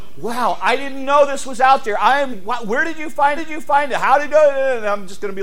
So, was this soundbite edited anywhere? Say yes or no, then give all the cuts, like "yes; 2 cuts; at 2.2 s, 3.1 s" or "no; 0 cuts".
yes; 3 cuts; at 2.3 s, 3.4 s, 4.3 s